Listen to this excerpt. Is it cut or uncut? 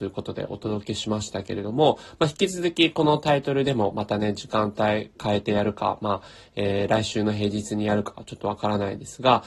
uncut